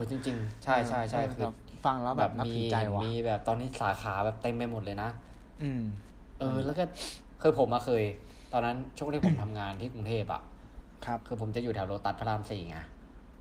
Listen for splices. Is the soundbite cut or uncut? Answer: uncut